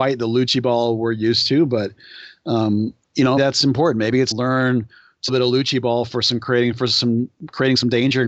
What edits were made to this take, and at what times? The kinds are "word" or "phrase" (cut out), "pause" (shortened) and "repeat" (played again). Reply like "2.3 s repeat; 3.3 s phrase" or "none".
3.0 s pause; 3.4 s word; 4.3 s phrase; 5.3 s phrase